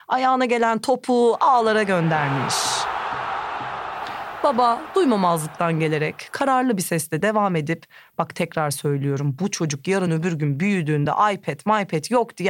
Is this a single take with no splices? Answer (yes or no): yes